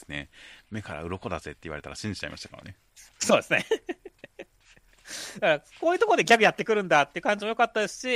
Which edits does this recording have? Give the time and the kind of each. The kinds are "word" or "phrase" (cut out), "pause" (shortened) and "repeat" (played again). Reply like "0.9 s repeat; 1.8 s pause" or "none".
3.1 s pause